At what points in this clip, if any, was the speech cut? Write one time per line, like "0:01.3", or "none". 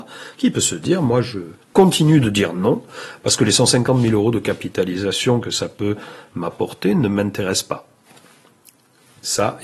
none